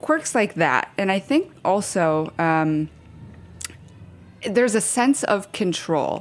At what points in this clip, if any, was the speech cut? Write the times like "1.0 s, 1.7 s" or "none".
none

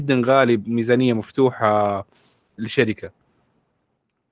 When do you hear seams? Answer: 2.6 s

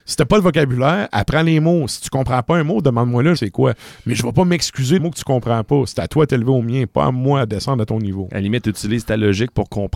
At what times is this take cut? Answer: 3.4 s, 5.0 s

